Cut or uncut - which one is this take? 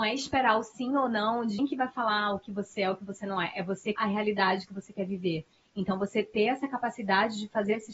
cut